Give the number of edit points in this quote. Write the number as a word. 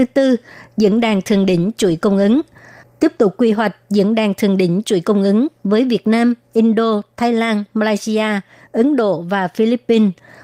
zero